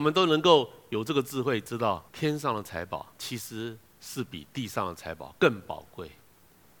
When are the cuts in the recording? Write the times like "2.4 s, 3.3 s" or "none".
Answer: 2.1 s, 3.1 s